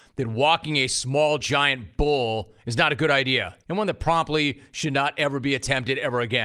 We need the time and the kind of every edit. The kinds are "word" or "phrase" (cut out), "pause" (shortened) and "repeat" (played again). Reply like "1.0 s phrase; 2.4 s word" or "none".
1.4 s phrase; 3.6 s pause